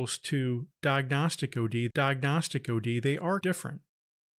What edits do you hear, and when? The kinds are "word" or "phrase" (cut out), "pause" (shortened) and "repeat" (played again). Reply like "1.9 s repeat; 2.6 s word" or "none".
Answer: 1.9 s repeat; 3.4 s word